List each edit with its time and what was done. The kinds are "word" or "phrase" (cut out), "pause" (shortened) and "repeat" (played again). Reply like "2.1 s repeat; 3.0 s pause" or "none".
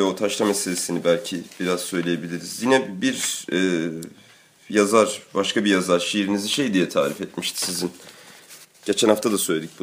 none

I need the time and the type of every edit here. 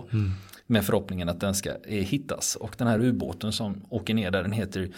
none

